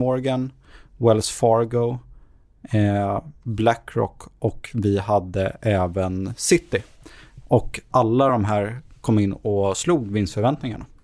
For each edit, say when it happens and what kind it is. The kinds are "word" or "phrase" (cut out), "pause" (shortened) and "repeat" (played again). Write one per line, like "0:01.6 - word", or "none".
none